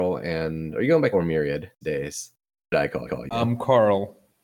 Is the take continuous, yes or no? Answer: no